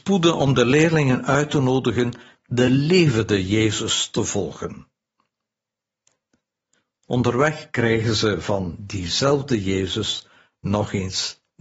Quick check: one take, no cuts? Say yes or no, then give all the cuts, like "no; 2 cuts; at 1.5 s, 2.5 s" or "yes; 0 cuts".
yes; 0 cuts